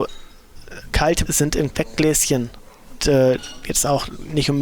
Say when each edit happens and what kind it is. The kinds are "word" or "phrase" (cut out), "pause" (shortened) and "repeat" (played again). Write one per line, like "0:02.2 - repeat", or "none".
0:01.3 - word
0:01.7 - word
0:03.0 - word